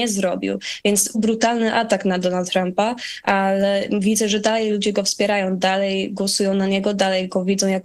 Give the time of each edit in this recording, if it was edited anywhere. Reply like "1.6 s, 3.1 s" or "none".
1.1 s